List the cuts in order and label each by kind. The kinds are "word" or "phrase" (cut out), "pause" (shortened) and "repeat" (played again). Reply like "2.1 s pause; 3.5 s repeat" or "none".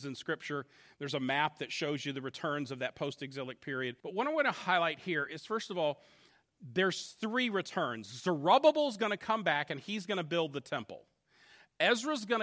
4.0 s pause

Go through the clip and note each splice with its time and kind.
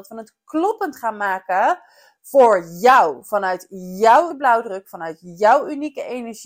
4.3 s word

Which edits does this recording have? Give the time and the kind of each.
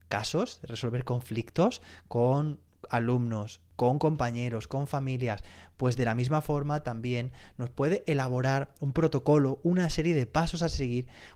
none

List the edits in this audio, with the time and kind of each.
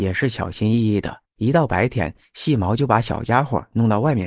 1.3 s pause

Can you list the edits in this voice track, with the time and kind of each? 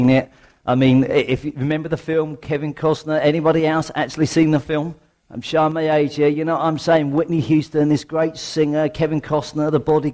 5.1 s pause

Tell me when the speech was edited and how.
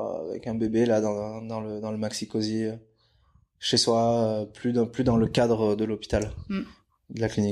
none

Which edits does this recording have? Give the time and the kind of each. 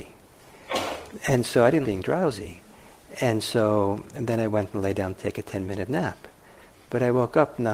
1.8 s word

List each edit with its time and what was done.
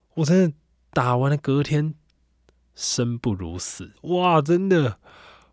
4.0 s pause

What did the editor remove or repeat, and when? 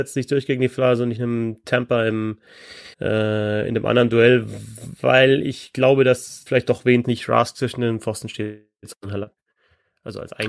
2.9 s pause; 6.5 s phrase; 7.0 s phrase

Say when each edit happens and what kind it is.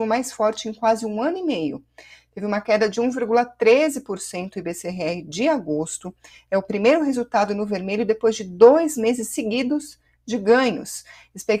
none

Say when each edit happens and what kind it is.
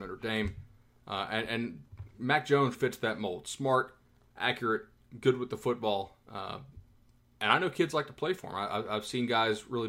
2.7 s word

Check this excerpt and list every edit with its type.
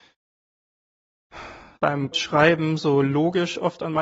1.8 s word; 2.1 s word

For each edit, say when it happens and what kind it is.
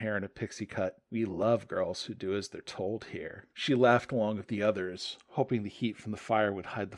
1.0 s pause; 3.5 s pause

